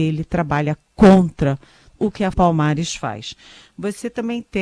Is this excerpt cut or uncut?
cut